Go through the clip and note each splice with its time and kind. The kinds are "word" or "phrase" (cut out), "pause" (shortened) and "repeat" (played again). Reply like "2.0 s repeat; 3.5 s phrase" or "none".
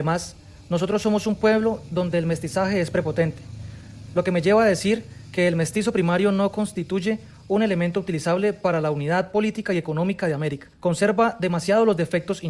10.7 s pause

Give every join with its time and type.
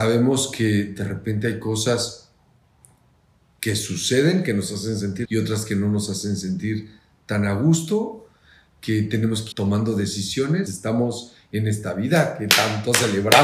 5.3 s word; 9.5 s word; 10.7 s word

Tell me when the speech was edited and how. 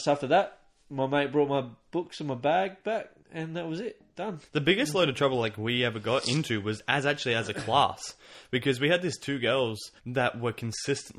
4.5 s pause; 10.0 s pause

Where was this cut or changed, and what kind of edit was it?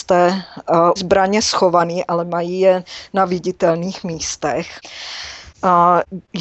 1.0 s phrase

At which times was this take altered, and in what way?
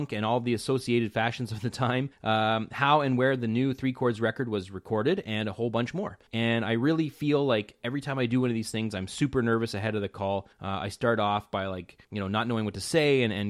2.1 s pause; 6.3 s pause; 10.5 s pause; 12.0 s pause

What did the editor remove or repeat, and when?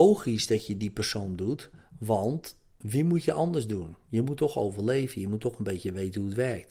none

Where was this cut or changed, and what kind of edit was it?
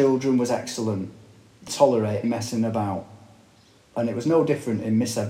1.7 s word; 2.2 s word

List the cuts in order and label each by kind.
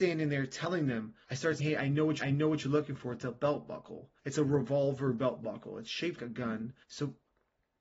1.2 s pause; 1.6 s word; 2.2 s repeat; 4.2 s pause; 6.2 s word; 6.8 s pause

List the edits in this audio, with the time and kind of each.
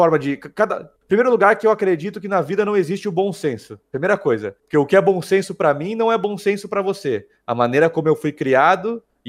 1.0 s pause; 3.9 s pause; 4.6 s pause

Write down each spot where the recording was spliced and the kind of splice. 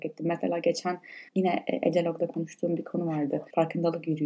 1.3 s pause

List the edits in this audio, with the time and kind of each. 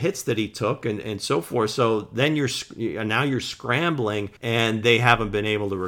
4.4 s pause

